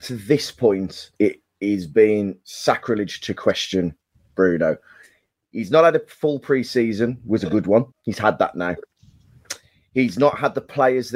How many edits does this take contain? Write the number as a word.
two